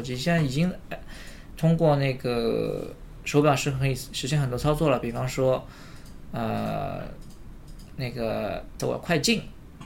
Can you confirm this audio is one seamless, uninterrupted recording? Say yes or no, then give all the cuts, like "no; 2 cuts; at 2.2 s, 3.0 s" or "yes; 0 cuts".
no; 1 cut; at 8.8 s